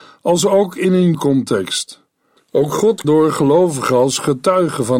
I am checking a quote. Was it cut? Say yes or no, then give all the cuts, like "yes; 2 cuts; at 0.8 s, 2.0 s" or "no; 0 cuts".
yes; 2 cuts; at 1.1 s, 3.0 s